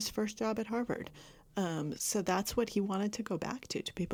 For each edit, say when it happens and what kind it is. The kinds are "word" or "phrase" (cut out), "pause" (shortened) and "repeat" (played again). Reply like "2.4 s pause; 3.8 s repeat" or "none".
2.0 s word